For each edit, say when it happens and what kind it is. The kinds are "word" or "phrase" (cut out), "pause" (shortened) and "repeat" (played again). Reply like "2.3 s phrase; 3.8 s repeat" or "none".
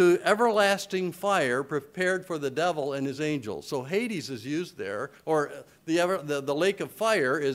none